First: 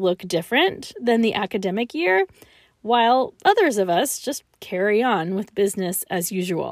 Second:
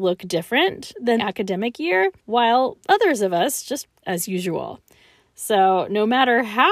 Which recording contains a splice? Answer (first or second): second